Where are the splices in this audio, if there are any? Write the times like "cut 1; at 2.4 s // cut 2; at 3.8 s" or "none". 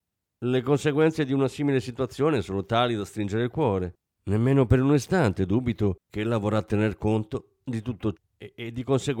cut 1; at 4.1 s // cut 2; at 6.0 s // cut 3; at 8.1 s